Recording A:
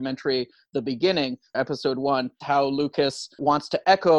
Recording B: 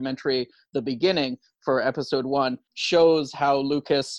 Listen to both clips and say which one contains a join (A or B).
A